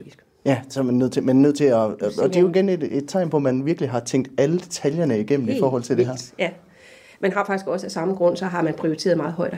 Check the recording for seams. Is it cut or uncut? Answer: uncut